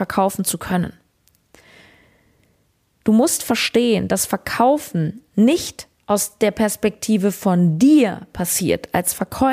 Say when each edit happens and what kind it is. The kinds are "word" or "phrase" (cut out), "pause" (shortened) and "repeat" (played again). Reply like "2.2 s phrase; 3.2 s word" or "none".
none